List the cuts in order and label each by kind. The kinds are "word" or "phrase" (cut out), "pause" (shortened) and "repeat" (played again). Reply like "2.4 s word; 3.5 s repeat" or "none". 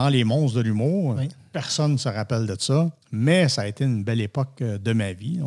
3.0 s pause